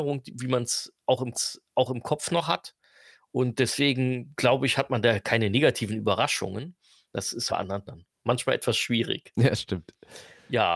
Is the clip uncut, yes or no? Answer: no